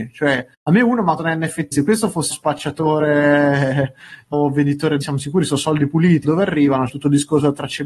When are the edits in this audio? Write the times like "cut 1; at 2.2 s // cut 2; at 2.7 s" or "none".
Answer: cut 1; at 1.2 s // cut 2; at 1.7 s // cut 3; at 2.3 s // cut 4; at 4.3 s // cut 5; at 5.0 s // cut 6; at 6.2 s // cut 7; at 6.9 s